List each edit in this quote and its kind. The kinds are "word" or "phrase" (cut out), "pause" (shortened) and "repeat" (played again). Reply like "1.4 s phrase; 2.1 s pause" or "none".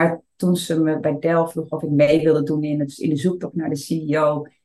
none